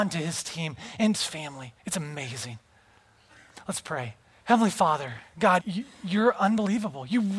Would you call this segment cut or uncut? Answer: cut